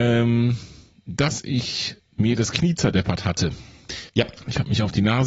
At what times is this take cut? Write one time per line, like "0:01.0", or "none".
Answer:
0:02.1
0:04.1